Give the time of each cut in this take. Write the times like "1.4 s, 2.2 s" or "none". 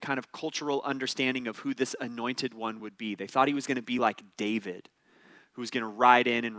none